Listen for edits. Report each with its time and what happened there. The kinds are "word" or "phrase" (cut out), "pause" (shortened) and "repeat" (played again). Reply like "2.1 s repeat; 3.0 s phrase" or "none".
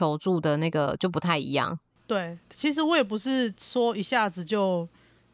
2.4 s pause